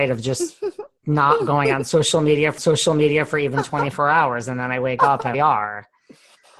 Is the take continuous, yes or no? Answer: no